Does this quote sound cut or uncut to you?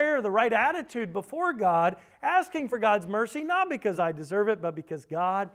uncut